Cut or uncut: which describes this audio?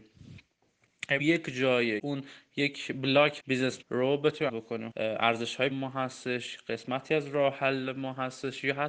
cut